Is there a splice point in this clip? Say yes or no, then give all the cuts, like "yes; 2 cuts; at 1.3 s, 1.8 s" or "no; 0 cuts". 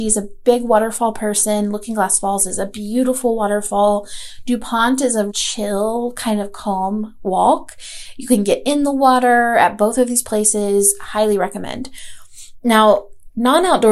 yes; 1 cut; at 5.3 s